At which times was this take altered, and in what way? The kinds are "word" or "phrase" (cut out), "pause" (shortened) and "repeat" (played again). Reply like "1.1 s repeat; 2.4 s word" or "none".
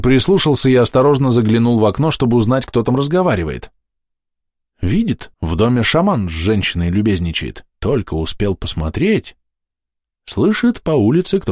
5.3 s pause; 7.7 s pause